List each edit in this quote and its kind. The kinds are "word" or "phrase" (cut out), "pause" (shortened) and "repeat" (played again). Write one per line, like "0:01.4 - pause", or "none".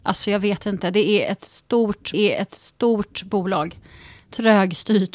0:02.1 - repeat